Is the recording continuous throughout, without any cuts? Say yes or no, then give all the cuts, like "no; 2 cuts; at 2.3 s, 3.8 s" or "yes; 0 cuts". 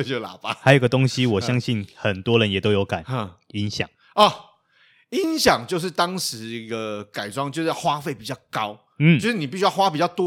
yes; 0 cuts